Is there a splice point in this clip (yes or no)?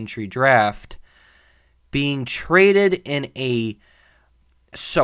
no